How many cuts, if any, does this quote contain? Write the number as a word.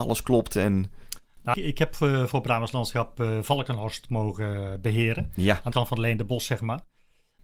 two